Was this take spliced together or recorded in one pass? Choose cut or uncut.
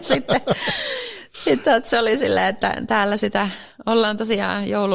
uncut